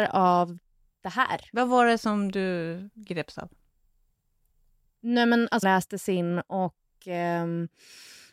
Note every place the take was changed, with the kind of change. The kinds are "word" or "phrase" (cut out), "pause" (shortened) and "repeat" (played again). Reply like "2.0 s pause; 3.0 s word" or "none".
5.6 s phrase